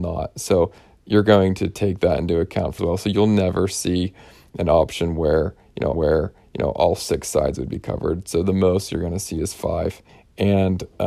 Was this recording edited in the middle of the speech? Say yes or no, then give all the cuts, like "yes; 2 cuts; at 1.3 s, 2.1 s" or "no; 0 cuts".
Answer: yes; 3 cuts; at 2.8 s, 5.9 s, 10.1 s